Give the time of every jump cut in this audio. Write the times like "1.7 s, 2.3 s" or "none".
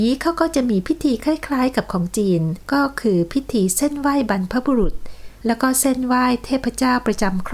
2.6 s